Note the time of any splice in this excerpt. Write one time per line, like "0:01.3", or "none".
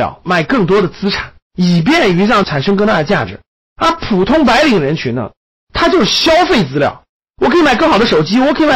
0:01.4